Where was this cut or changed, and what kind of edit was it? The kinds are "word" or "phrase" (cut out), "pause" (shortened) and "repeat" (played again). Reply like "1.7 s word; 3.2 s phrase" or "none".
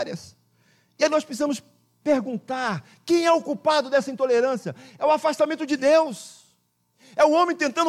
none